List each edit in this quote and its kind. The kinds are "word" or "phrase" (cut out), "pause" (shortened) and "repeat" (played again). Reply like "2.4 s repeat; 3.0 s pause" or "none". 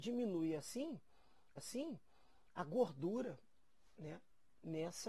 1.6 s repeat